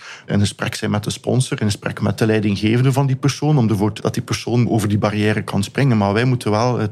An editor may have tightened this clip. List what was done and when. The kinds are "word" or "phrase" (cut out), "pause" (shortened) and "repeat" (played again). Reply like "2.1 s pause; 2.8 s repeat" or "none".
4.0 s phrase